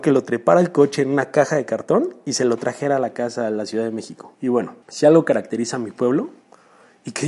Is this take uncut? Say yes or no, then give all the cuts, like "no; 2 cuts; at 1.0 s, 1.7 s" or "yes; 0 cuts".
no; 2 cuts; at 4.3 s, 4.8 s